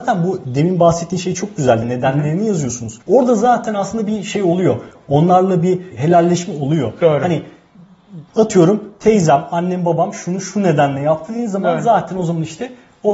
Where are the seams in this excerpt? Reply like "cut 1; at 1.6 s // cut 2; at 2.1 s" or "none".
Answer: cut 1; at 1.8 s // cut 2; at 3.0 s // cut 3; at 5.9 s // cut 4; at 8.3 s